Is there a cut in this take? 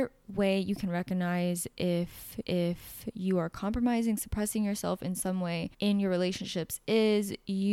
yes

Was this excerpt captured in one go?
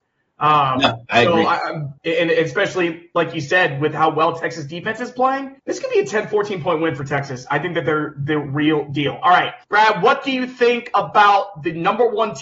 no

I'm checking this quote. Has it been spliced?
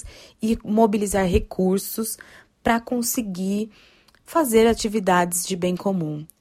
no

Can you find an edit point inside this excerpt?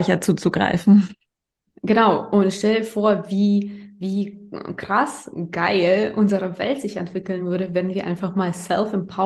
no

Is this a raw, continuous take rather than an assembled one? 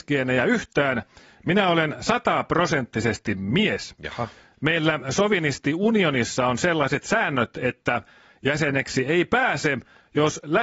yes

